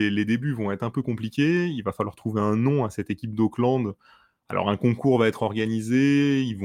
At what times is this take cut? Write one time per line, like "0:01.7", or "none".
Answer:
none